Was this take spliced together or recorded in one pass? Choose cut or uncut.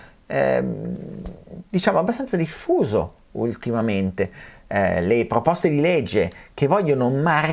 uncut